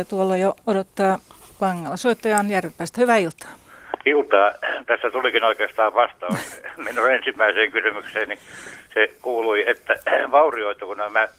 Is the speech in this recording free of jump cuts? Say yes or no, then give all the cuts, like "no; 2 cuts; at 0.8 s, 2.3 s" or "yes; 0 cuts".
yes; 0 cuts